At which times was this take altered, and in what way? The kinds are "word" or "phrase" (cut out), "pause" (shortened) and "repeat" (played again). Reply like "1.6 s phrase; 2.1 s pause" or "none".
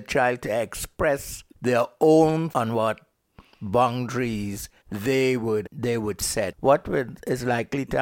1.5 s pause; 2.5 s word; 4.8 s pause; 5.6 s word